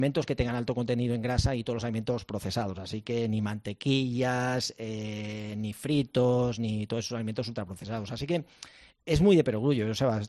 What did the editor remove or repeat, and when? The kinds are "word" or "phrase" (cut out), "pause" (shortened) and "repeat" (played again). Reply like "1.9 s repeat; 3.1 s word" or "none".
none